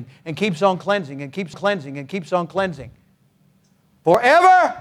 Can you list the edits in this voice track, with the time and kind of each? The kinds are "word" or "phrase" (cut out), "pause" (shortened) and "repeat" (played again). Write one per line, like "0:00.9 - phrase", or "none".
0:01.5 - repeat

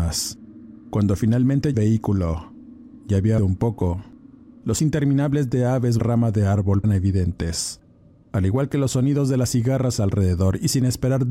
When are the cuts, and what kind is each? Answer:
0:01.7 - phrase
0:03.4 - word
0:04.8 - word
0:06.0 - phrase
0:06.8 - phrase

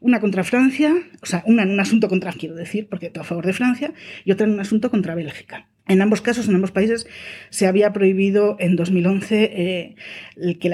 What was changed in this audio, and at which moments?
0:02.3 - word
0:03.1 - word
0:05.8 - pause

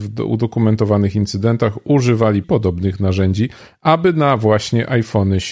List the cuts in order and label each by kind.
0:02.4 - phrase

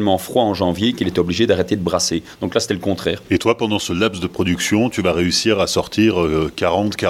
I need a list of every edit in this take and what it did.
none

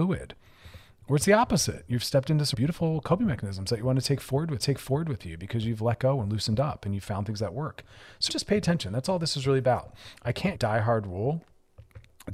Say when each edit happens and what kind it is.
0:02.5 - word
0:04.6 - repeat
0:08.3 - word
0:10.5 - phrase

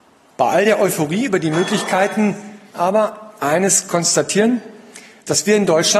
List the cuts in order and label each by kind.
0:02.7 - phrase

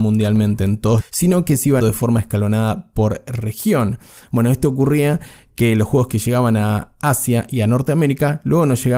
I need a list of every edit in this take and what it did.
0:01.0 - word
0:01.8 - word

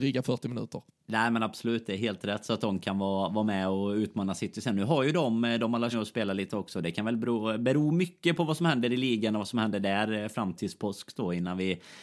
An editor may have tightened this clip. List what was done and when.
0:05.9 - phrase
0:10.6 - word

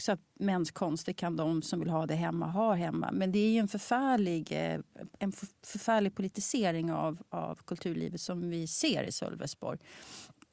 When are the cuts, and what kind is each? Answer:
none

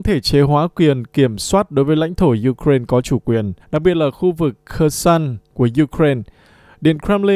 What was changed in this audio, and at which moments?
0:03.6 - pause

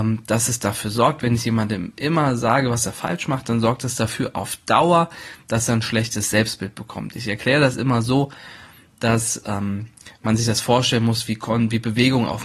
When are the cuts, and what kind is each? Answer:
none

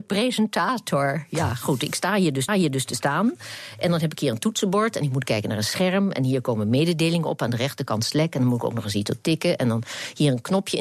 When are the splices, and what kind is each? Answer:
0:02.5 - repeat

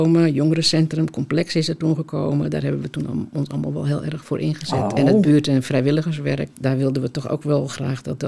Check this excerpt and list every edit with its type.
0:06.5 - word

